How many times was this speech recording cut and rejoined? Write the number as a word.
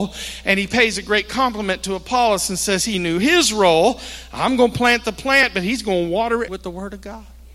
one